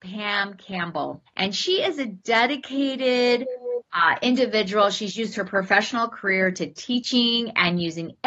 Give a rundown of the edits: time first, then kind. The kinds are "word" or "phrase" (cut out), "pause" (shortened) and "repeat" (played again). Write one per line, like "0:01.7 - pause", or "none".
0:01.3 - pause